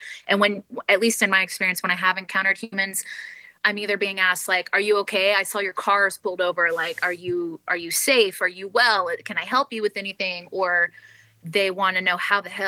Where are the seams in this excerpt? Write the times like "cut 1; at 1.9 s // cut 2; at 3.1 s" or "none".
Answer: none